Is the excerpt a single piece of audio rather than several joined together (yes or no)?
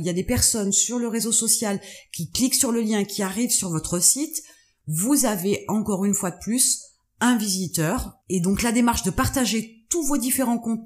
yes